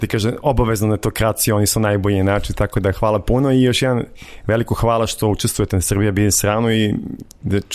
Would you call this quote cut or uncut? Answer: uncut